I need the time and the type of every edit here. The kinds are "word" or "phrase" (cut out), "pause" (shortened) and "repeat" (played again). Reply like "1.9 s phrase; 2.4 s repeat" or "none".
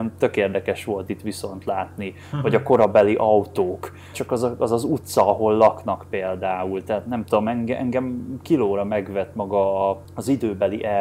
4.1 s word